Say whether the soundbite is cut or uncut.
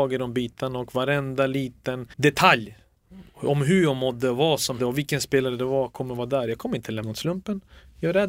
cut